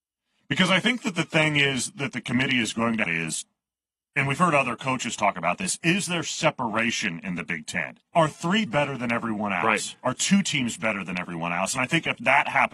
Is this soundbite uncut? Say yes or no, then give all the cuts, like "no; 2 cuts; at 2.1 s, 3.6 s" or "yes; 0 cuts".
no; 3 cuts; at 3.1 s, 8.1 s, 8.7 s